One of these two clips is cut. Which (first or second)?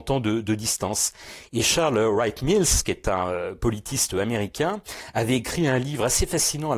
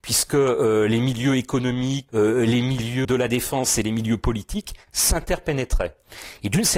second